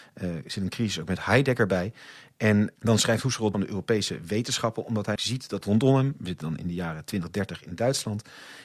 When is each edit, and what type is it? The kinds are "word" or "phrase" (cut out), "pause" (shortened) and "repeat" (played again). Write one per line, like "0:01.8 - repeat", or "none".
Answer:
0:02.8 - word
0:03.5 - phrase
0:05.2 - word
0:05.6 - phrase